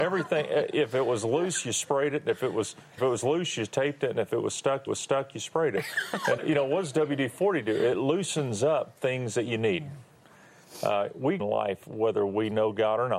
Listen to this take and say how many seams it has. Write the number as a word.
four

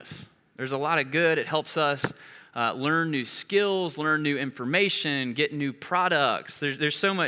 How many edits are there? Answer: zero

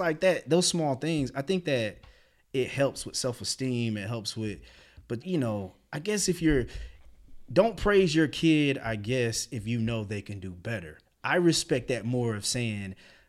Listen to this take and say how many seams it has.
one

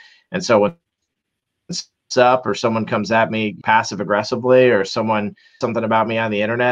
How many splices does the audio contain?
two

